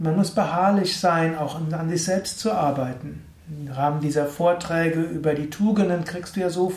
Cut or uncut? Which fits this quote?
uncut